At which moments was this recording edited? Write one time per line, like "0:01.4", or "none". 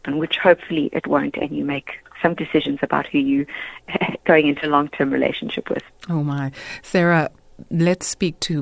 0:02.4